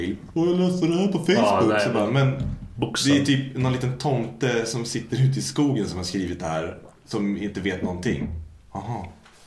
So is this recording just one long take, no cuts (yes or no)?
yes